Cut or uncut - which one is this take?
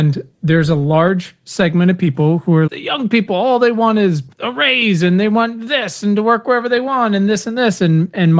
cut